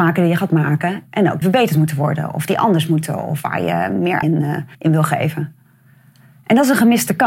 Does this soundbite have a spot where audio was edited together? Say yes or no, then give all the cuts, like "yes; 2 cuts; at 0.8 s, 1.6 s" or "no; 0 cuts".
yes; 3 cuts; at 1.4 s, 4.2 s, 4.7 s